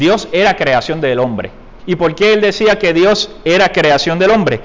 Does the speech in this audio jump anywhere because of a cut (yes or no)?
yes